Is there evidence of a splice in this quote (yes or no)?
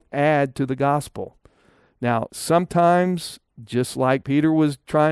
no